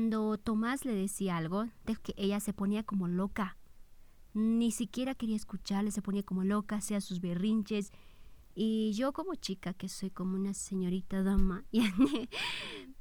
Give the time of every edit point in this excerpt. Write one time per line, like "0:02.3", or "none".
0:02.0